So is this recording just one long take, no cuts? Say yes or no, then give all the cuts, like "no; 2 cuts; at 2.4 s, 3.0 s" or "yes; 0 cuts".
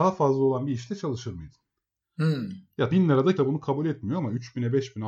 no; 2 cuts; at 2.9 s, 3.4 s